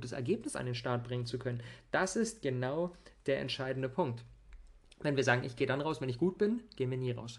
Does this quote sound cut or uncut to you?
uncut